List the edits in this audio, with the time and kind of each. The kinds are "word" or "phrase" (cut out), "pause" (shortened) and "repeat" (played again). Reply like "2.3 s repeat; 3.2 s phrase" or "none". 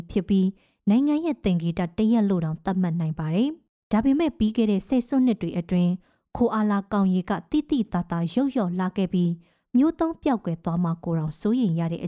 3.7 s pause